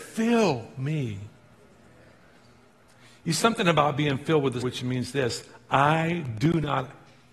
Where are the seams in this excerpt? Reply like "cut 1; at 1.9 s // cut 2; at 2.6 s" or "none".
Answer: cut 1; at 3.4 s // cut 2; at 4.6 s